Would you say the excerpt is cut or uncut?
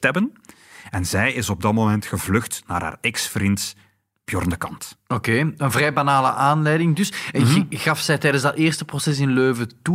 uncut